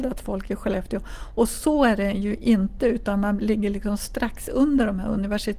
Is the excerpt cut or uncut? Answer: uncut